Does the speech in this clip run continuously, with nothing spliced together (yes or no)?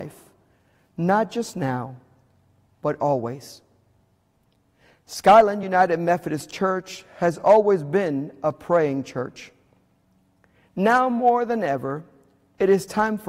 yes